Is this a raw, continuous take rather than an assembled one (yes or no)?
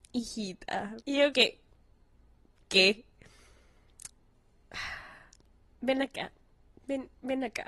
no